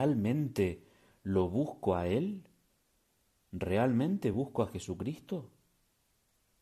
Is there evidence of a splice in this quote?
no; 0 cuts

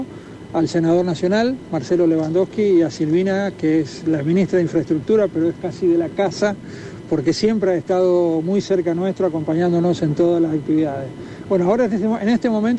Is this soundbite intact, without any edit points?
yes; 0 cuts

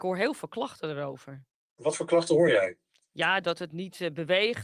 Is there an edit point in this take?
no; 0 cuts

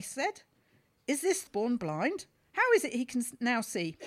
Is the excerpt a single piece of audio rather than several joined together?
no; 1 cut; at 1.5 s

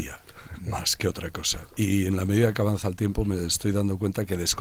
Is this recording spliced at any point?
no; 0 cuts

